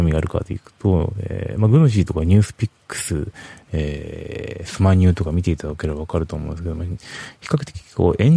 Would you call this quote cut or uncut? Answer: uncut